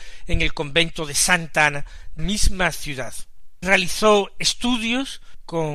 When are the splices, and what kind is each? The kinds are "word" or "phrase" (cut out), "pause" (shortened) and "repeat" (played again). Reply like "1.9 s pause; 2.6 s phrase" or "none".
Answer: 2.2 s word